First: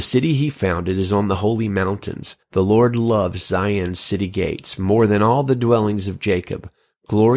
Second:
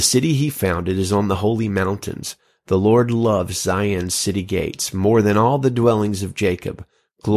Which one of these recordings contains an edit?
first; 1 cut; at 2.4 s

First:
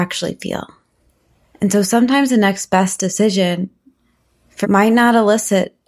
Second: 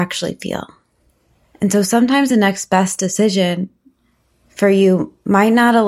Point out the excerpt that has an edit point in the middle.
first; 1 cut; at 4.6 s

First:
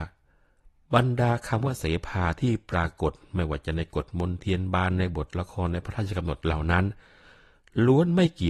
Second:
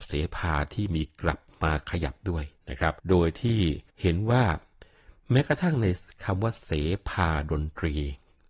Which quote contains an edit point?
second; 3 cuts; at 2.6 s, 3.0 s, 3.9 s

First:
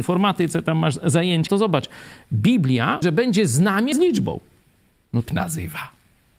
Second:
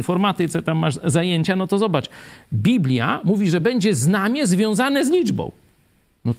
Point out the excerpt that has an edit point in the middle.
first; 4 cuts; at 1.5 s, 3.0 s, 3.9 s, 5.3 s

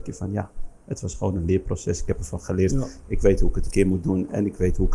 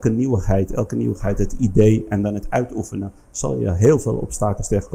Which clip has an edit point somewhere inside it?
first; 1 cut; at 3.7 s

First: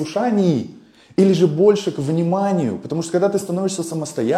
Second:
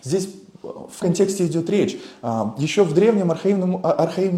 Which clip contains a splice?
second; 1 cut; at 1.0 s

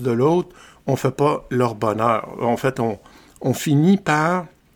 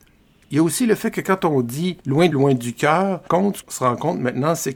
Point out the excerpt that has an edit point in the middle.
second; 4 cuts; at 2.0 s, 2.3 s, 3.3 s, 3.6 s

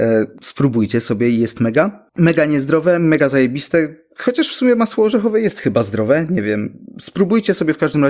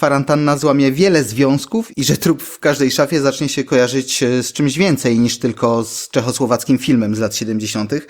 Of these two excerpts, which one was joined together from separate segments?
first; 1 cut; at 2.1 s

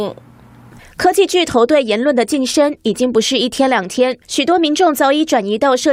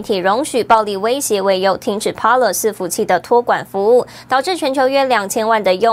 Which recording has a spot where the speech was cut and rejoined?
first; 1 cut; at 4.2 s

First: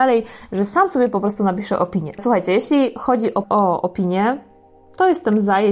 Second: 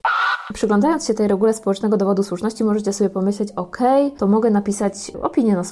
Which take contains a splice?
first; 1 cut; at 3.4 s

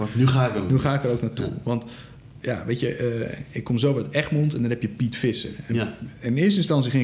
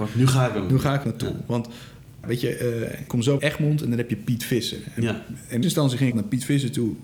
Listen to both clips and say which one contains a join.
second; 6 cuts; at 1.0 s, 2.2 s, 3.1 s, 3.4 s, 5.6 s, 6.1 s

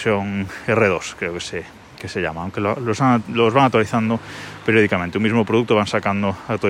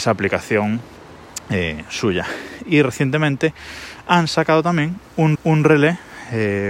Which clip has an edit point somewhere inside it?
second; 1 cut; at 5.3 s

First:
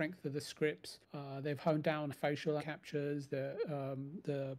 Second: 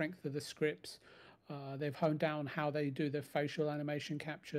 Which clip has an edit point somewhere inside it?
first; 3 cuts; at 1.0 s, 2.1 s, 2.6 s

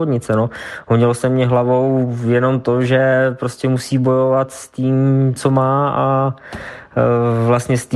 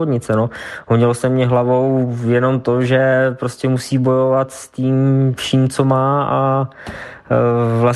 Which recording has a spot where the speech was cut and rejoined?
first; 1 cut; at 5.4 s

